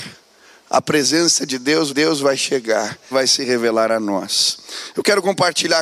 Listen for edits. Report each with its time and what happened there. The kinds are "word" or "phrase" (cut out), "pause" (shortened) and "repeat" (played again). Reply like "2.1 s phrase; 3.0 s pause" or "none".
1.9 s repeat; 3.1 s word

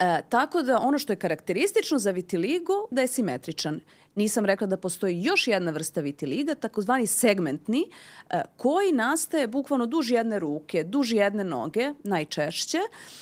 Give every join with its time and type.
2.9 s phrase

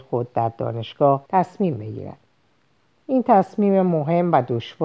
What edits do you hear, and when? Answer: 1.3 s pause

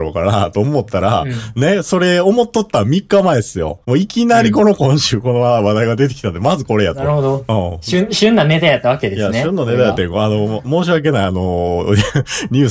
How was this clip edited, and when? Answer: 3.8 s pause

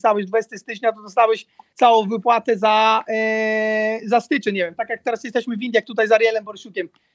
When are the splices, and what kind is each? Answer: none

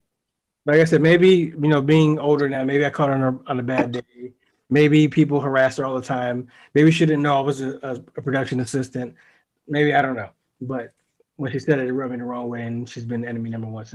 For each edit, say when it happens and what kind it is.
none

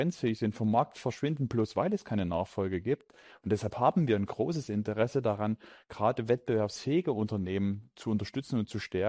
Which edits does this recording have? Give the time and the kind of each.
none

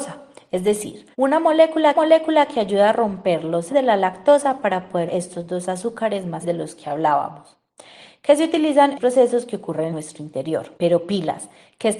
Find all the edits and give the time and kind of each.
1.1 s pause; 1.9 s repeat; 3.7 s word; 5.1 s word; 6.4 s word; 8.9 s phrase; 9.9 s word; 10.8 s pause

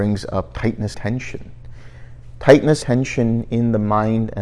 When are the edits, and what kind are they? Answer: 0.9 s word; 2.8 s word

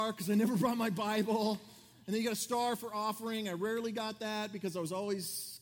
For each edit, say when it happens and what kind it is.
none

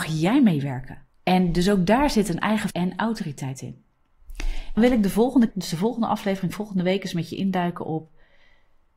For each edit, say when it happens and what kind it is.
1.1 s pause; 2.7 s word; 4.8 s word; 5.5 s word

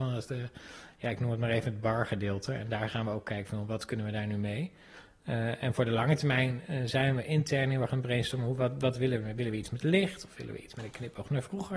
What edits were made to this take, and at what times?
none

